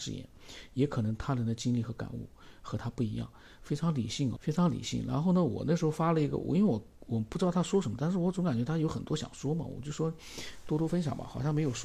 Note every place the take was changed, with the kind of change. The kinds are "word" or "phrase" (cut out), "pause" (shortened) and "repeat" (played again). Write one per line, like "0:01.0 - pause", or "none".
0:04.4 - word